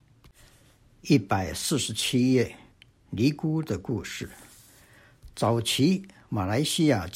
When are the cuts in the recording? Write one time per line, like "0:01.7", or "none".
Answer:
none